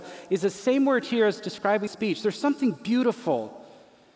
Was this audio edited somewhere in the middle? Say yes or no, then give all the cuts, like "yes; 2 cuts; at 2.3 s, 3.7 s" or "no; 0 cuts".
yes; 1 cut; at 1.9 s